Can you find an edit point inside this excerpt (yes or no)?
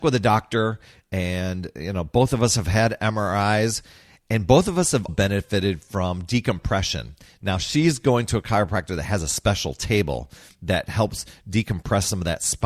yes